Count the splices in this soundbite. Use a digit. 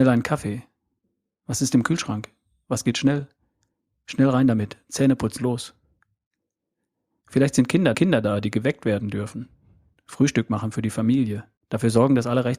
3